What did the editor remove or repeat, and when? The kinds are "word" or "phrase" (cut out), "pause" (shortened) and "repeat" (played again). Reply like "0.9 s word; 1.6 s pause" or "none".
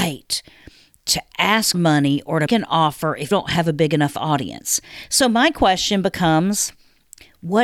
1.7 s word; 2.5 s word; 3.3 s word